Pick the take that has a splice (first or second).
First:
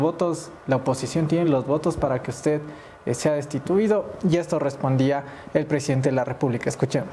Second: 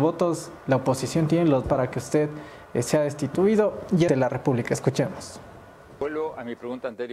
second